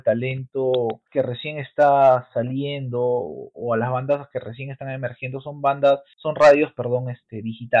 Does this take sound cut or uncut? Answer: cut